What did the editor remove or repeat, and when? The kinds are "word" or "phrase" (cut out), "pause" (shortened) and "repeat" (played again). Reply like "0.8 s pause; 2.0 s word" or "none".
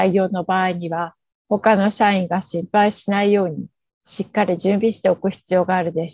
none